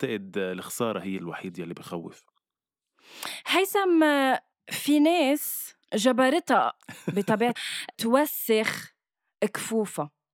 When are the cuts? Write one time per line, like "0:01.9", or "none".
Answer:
0:01.2
0:04.5
0:05.8
0:07.6
0:07.9

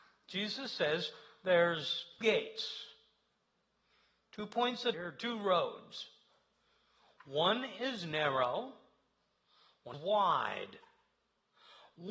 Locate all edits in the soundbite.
0:02.2
0:04.9
0:09.9

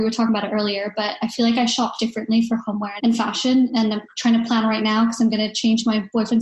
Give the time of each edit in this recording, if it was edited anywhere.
none

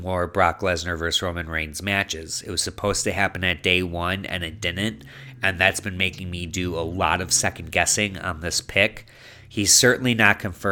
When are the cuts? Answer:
none

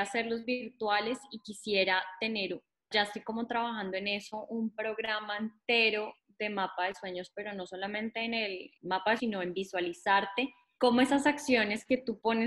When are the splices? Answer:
0:02.9
0:08.8
0:09.2
0:10.8

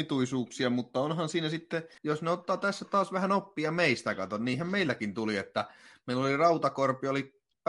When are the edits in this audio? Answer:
0:02.0

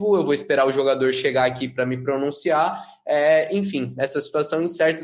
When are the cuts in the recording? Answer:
none

